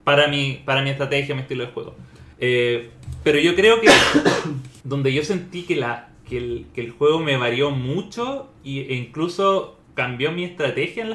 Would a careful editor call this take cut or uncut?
cut